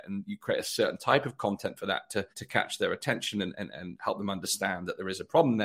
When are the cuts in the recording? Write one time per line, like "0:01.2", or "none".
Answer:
0:02.3